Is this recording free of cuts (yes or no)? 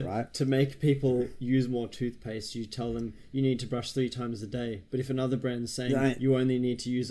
yes